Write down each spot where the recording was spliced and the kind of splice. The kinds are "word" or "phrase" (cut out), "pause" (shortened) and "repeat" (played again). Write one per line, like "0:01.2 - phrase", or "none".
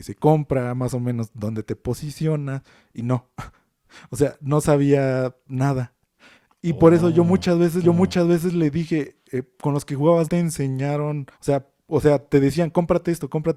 0:07.8 - repeat
0:10.2 - word
0:11.3 - pause